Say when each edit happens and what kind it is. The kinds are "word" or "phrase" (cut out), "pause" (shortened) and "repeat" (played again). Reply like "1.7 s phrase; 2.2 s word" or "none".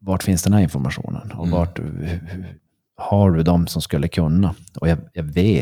2.7 s pause